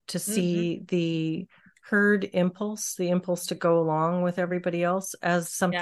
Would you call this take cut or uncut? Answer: uncut